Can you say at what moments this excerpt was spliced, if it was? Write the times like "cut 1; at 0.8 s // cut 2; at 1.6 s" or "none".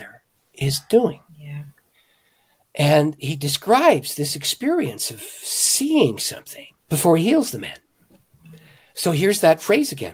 cut 1; at 1.3 s // cut 2; at 6.8 s